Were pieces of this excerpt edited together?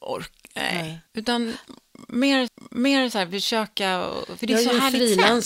yes; 2 cuts; at 1.1 s, 2.5 s

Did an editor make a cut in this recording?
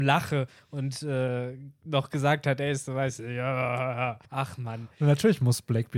yes; 1 cut; at 4.3 s

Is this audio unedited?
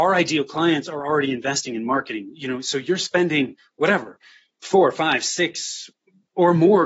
yes; 0 cuts

